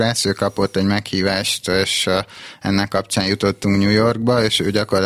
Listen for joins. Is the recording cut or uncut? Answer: uncut